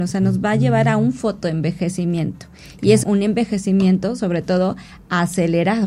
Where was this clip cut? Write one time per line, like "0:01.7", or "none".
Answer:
0:03.0